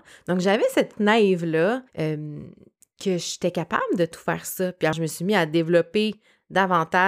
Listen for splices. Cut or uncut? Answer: cut